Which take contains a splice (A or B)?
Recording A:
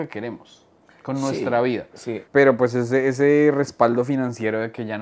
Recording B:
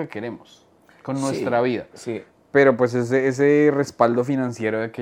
A